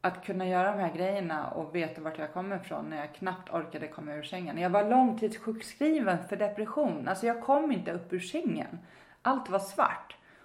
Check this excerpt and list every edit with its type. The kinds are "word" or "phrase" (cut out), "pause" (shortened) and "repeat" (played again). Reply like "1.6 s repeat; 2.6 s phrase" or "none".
none